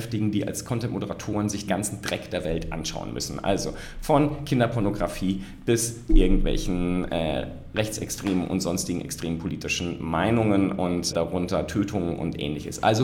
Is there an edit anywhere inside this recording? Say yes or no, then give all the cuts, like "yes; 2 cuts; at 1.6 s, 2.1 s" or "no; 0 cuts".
yes; 3 cuts; at 1.7 s, 6.1 s, 11.1 s